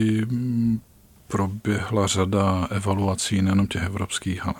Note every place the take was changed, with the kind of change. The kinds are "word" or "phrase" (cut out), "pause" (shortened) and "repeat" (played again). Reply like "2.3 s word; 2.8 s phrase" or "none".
none